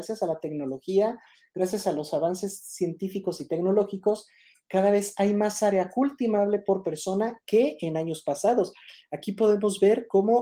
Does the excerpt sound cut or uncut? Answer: uncut